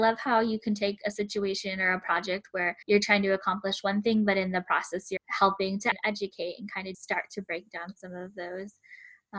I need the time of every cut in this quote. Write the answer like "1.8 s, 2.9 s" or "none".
2.8 s, 5.2 s, 5.9 s, 6.9 s